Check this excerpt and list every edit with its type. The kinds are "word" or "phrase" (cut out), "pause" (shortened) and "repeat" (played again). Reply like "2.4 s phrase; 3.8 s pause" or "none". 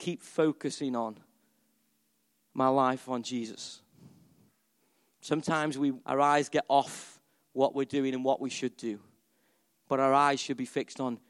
6.0 s pause